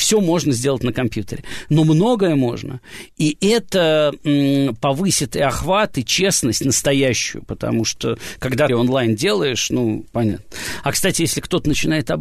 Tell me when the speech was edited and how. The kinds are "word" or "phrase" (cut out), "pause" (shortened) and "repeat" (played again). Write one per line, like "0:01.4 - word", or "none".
0:08.7 - phrase